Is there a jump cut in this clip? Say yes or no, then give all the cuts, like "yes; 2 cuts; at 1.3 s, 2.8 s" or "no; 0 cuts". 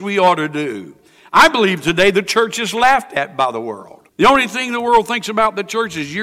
yes; 1 cut; at 4.1 s